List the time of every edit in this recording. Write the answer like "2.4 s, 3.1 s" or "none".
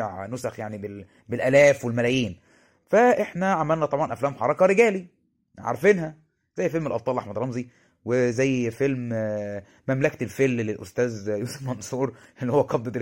none